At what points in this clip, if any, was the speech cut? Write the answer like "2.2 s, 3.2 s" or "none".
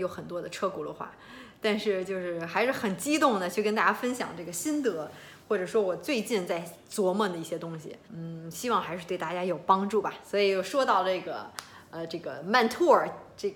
5.4 s, 8.0 s